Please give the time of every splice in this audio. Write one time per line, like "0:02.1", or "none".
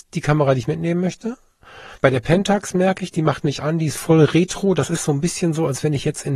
0:02.0